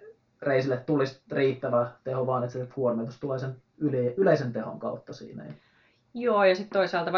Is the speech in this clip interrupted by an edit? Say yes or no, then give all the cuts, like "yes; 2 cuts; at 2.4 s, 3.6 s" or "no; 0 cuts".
no; 0 cuts